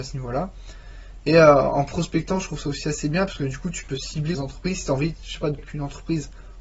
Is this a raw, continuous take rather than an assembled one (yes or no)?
no